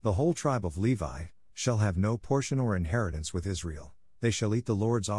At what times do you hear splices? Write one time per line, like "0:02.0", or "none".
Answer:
none